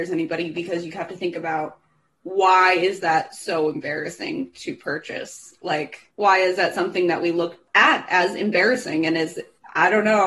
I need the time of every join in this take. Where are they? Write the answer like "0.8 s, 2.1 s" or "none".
none